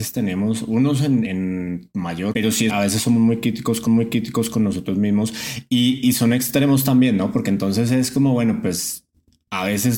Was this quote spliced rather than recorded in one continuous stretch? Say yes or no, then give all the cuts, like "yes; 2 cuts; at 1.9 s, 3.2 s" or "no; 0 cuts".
yes; 4 cuts; at 1.2 s, 2.3 s, 2.7 s, 3.9 s